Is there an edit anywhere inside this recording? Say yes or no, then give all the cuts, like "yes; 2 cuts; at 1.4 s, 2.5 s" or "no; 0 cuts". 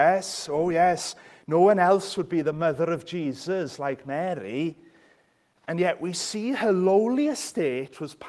no; 0 cuts